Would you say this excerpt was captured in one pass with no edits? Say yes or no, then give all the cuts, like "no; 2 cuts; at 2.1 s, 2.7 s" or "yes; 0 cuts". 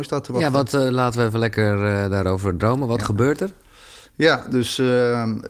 yes; 0 cuts